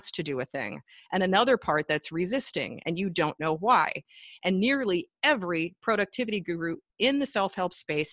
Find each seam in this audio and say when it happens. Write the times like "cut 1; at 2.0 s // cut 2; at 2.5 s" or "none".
none